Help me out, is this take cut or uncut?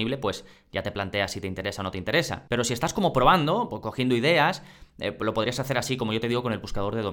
uncut